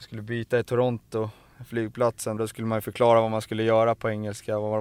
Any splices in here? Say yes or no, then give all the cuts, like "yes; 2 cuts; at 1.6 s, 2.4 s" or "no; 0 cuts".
yes; 1 cut; at 2.4 s